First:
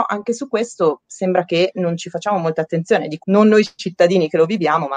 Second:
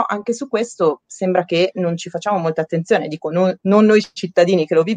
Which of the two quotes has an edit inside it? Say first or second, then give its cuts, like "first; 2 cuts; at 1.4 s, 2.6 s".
first; 1 cut; at 3.2 s